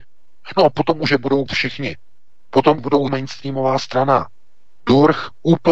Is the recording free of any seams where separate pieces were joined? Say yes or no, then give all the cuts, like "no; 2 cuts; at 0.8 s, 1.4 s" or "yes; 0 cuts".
no; 3 cuts; at 1.5 s, 2.8 s, 3.1 s